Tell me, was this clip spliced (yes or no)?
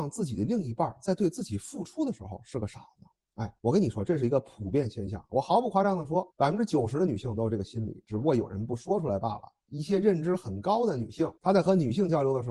yes